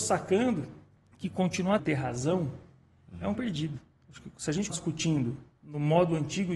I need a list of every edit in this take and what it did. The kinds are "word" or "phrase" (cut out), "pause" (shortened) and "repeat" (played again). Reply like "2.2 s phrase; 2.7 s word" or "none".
0.9 s pause; 1.8 s word; 3.3 s word; 4.7 s word

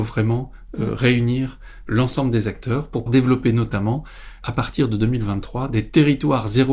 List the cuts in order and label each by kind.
3.1 s word

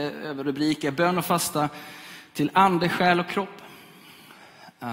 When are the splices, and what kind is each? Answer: none

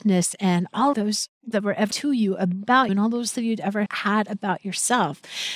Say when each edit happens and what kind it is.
0.9 s word; 1.5 s word; 1.9 s word; 2.9 s word; 3.3 s word; 3.9 s word

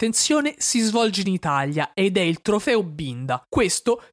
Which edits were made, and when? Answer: none

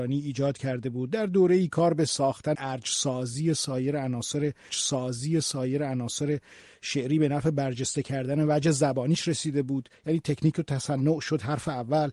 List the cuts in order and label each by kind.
2.5 s phrase; 4.7 s repeat

